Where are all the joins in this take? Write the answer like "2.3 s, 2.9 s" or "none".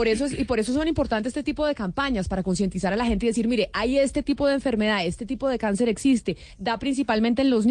none